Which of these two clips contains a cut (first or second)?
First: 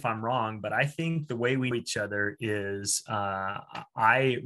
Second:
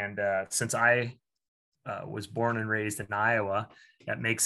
first